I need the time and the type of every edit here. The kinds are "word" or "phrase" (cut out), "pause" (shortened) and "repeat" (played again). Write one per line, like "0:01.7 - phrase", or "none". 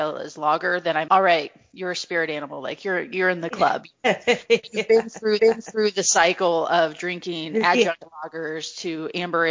0:01.1 - word
0:05.4 - repeat